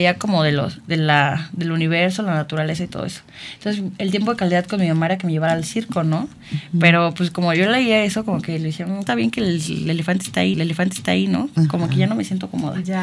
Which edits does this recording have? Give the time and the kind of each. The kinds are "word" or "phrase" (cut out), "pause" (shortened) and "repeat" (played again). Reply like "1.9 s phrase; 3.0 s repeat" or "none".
9.1 s phrase; 10.5 s repeat